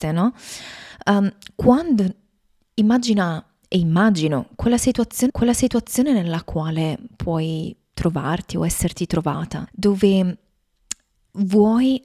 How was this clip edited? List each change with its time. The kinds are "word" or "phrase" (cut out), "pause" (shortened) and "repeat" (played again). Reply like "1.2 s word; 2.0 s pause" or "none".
5.3 s repeat; 9.7 s word